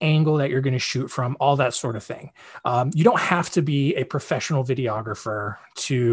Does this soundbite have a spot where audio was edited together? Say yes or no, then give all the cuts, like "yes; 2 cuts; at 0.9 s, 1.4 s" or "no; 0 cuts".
no; 0 cuts